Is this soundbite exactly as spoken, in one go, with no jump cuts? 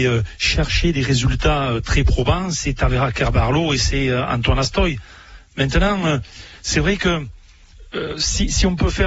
yes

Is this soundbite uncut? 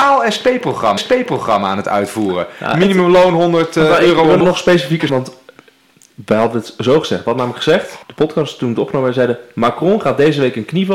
no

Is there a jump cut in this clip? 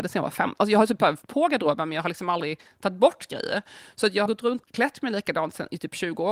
yes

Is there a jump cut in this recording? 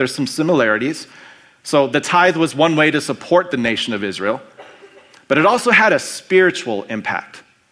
no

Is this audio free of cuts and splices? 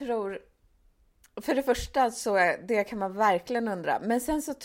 yes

